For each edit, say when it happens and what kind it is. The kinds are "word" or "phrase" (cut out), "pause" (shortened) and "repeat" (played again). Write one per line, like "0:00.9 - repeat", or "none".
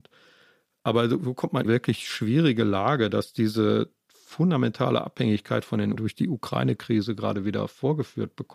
0:01.6 - phrase
0:05.9 - phrase